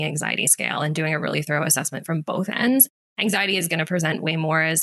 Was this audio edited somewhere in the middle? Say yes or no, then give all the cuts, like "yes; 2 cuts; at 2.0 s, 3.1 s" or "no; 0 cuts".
no; 0 cuts